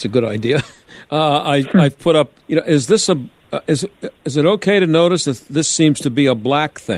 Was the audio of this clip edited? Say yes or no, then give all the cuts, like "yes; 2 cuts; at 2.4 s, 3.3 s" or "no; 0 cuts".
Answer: yes; 1 cut; at 2.4 s